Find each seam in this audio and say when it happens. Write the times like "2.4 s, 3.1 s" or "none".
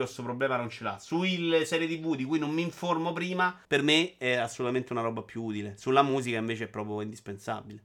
3.6 s